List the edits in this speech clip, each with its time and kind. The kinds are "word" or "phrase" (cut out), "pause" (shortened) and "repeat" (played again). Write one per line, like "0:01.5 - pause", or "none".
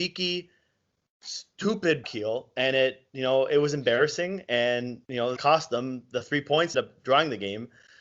0:02.0 - word
0:03.1 - pause
0:05.0 - pause
0:05.4 - word
0:06.7 - phrase